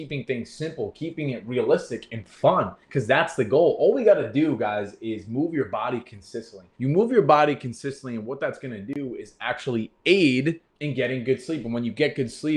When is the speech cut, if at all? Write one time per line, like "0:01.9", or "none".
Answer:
0:02.8
0:06.7
0:10.7